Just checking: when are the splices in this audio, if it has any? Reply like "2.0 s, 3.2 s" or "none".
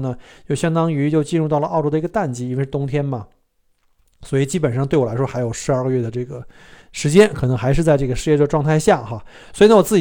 6.8 s